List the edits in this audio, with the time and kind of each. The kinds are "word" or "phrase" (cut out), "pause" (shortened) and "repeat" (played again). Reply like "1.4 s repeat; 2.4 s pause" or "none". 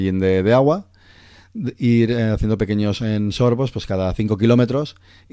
none